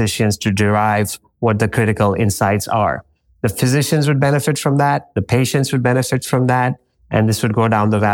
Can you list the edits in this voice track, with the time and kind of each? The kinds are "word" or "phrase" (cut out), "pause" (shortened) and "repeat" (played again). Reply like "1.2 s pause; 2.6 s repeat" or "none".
none